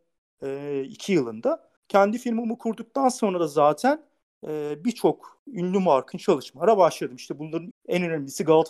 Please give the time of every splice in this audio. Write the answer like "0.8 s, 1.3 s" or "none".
1.8 s, 6.1 s, 7.7 s